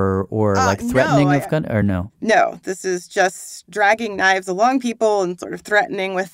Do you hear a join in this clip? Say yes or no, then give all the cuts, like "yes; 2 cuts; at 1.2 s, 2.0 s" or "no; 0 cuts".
no; 0 cuts